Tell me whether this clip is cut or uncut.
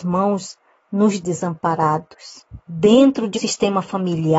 cut